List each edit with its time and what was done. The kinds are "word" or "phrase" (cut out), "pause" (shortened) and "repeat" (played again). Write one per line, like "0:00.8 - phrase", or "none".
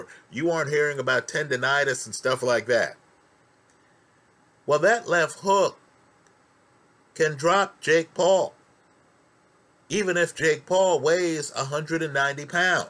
none

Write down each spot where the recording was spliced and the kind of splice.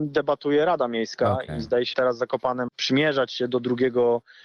0:01.9 - word
0:02.7 - word

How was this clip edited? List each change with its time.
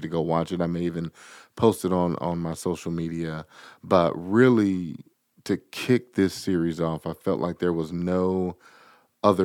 none

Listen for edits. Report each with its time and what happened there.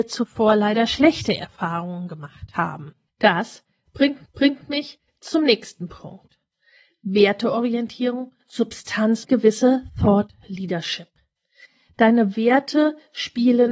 0:03.1 - pause
0:04.3 - repeat
0:09.2 - phrase

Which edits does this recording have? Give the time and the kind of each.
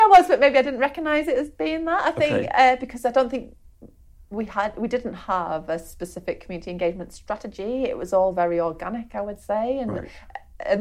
none

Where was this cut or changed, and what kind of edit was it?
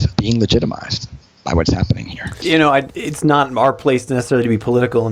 none

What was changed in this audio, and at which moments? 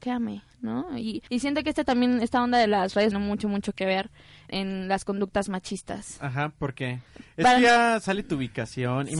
0:01.3 - pause
0:03.1 - phrase
0:04.5 - word
0:07.1 - pause

